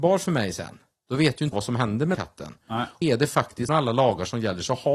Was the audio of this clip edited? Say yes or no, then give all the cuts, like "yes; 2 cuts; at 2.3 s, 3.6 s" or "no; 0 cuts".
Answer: yes; 4 cuts; at 1.5 s, 2.1 s, 3.0 s, 3.7 s